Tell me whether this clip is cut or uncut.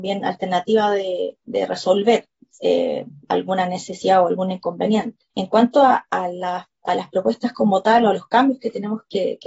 cut